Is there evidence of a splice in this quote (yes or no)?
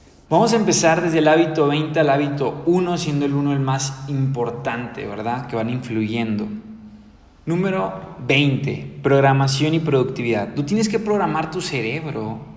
yes